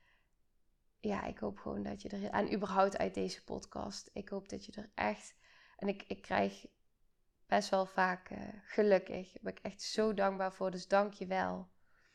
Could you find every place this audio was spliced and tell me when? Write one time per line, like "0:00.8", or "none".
none

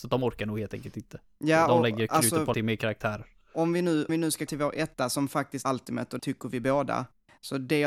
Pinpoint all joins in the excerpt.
0:02.5
0:04.1
0:04.5
0:05.6
0:06.2

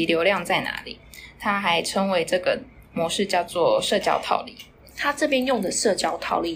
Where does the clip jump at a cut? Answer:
none

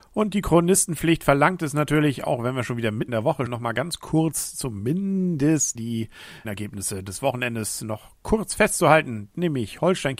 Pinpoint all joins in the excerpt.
0:03.1
0:03.5
0:05.8
0:06.4

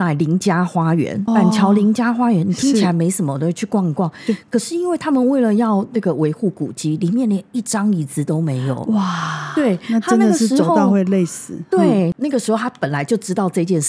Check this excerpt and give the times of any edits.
0:01.3

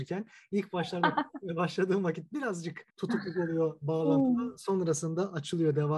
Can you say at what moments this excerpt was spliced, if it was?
0:02.9

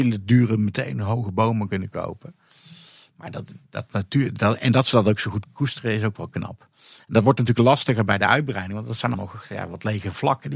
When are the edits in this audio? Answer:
0:03.6
0:09.1

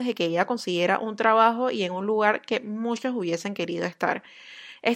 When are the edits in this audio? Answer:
none

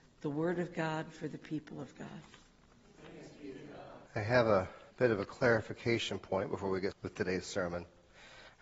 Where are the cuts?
0:04.1
0:04.9
0:06.9

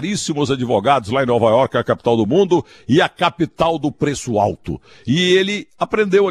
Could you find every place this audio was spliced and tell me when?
none

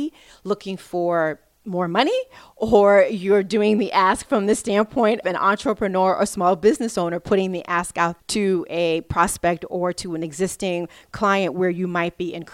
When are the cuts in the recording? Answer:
0:05.2
0:08.2

